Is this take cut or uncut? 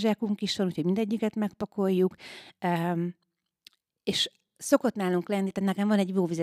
uncut